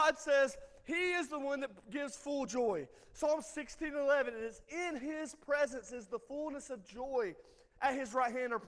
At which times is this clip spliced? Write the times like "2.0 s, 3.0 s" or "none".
none

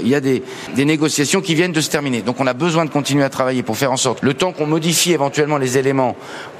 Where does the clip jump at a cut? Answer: 4.2 s

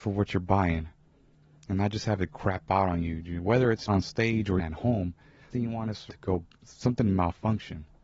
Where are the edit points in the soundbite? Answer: 3.9 s, 4.6 s, 5.5 s, 6.1 s, 6.5 s

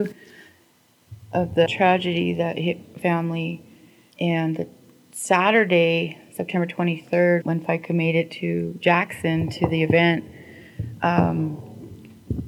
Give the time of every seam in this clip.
1.7 s, 3.0 s, 7.4 s

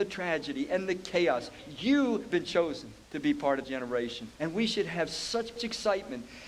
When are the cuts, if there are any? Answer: 2.3 s, 3.0 s, 3.6 s, 4.3 s, 5.6 s

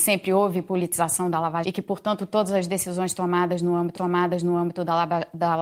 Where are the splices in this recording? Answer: 1.6 s, 4.0 s

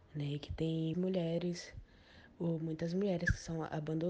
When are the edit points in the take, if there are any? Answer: 0.9 s

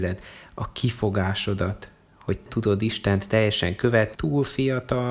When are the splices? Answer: 2.5 s, 4.1 s

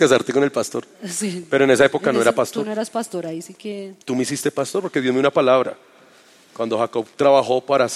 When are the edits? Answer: 4.0 s

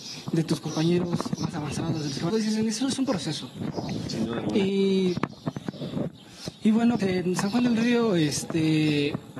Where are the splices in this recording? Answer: 2.3 s, 7.0 s

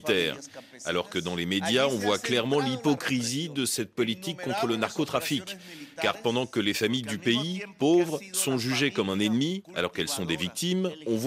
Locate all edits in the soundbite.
none

